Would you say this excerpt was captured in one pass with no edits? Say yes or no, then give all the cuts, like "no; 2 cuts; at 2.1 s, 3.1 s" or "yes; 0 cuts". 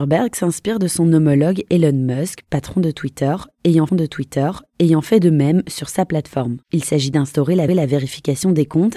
no; 3 cuts; at 3.9 s, 6.6 s, 7.7 s